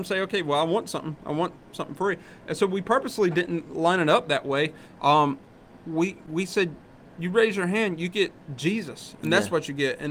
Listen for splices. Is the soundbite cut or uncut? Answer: uncut